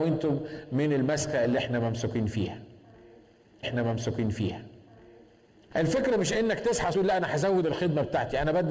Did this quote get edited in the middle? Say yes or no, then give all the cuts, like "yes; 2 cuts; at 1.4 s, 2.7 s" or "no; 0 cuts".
yes; 2 cuts; at 3.6 s, 6.9 s